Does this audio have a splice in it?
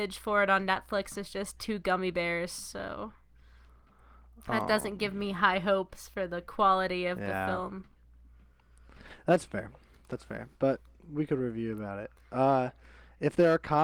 no; 0 cuts

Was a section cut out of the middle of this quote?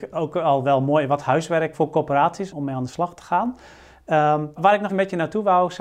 yes; 4 cuts; at 1.7 s, 2.5 s, 4.6 s, 4.9 s

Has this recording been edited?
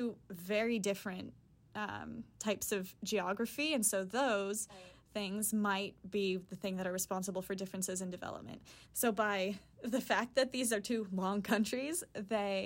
yes; 2 cuts; at 2.3 s, 8.8 s

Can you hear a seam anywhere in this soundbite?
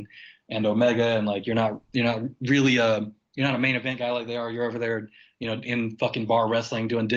no; 0 cuts

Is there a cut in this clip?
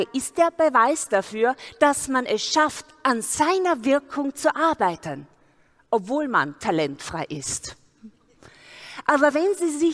no; 0 cuts

